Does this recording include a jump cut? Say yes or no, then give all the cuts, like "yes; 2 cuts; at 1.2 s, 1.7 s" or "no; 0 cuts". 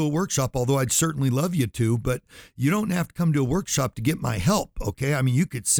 no; 0 cuts